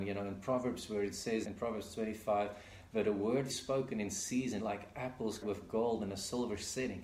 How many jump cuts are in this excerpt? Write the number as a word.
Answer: four